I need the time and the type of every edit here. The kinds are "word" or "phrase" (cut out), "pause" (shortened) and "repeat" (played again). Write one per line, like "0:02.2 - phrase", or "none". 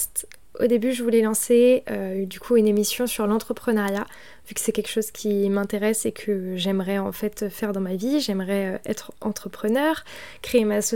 none